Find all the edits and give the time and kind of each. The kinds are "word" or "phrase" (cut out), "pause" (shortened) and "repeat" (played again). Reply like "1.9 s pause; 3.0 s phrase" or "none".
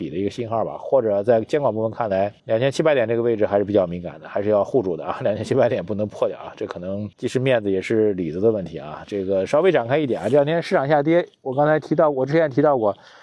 2.4 s pause; 7.1 s pause